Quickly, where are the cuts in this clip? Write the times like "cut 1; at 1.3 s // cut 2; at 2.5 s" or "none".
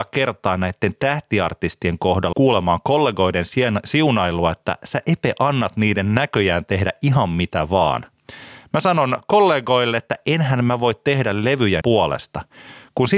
cut 1; at 2.3 s // cut 2; at 11.8 s